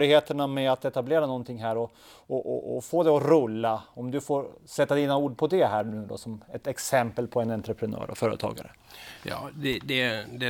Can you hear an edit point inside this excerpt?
no; 0 cuts

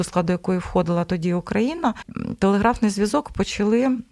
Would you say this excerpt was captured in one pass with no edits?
yes; 0 cuts

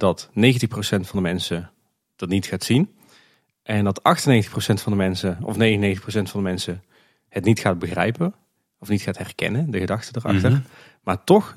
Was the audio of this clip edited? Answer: no; 0 cuts

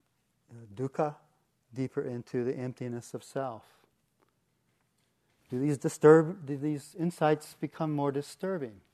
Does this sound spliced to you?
no; 0 cuts

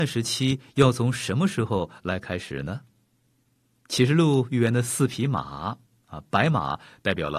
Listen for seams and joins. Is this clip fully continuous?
yes; 0 cuts

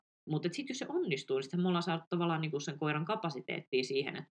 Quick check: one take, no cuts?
no; 1 cut; at 2.5 s

